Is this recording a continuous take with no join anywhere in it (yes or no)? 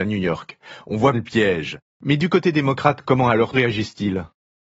no